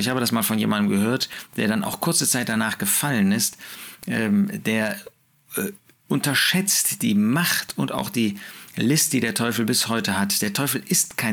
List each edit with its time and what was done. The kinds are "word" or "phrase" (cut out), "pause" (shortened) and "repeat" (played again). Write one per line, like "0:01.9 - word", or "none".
none

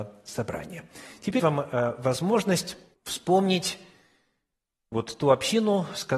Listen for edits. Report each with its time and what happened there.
0:01.4 - phrase
0:02.9 - pause

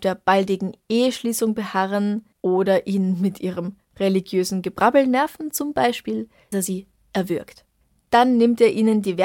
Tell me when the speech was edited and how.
0:06.5 - word

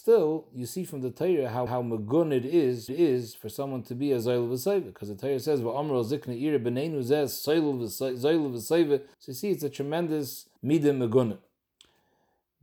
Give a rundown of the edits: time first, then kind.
0:01.7 - repeat
0:02.9 - repeat
0:09.1 - pause
0:10.6 - pause

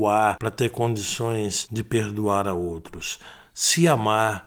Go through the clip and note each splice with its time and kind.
none

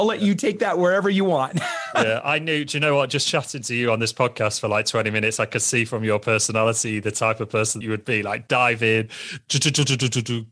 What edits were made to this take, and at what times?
0:07.8 - word

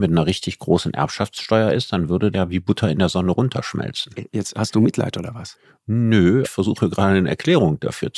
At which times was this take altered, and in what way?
0:02.3 - word
0:06.4 - word

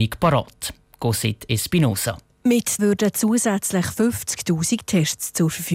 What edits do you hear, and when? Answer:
0:02.8 - phrase

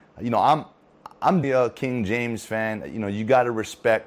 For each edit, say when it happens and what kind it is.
0:01.4 - word

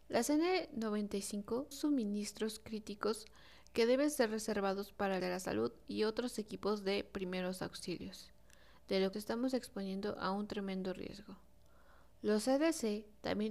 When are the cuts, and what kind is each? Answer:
0:01.7 - word
0:05.2 - phrase
0:09.1 - phrase

